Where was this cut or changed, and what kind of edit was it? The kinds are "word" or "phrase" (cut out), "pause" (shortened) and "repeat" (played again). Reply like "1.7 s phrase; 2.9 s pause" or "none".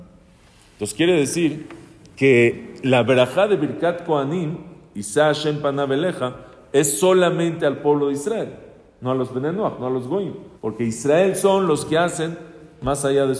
10.6 s pause